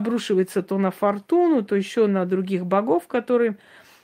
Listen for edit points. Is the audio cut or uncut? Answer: uncut